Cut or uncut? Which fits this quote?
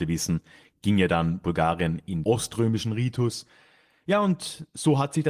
cut